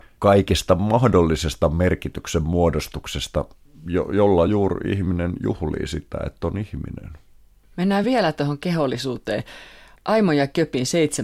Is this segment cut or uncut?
uncut